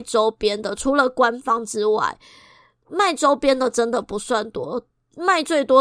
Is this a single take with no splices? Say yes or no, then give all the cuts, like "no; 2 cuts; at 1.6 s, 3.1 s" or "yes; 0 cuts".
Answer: yes; 0 cuts